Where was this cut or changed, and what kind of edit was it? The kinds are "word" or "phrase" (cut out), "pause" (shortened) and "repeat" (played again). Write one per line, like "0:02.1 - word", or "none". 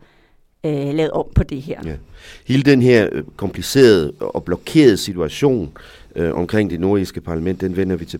none